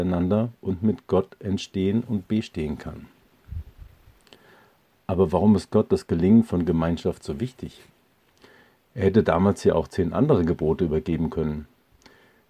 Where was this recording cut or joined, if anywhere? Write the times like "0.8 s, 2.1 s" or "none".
none